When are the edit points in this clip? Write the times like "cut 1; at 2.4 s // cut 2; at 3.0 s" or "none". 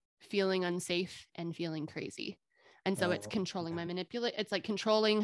none